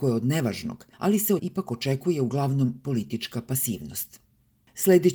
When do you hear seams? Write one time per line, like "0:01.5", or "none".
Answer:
0:00.9
0:01.4